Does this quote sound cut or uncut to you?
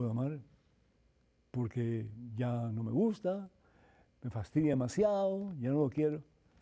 uncut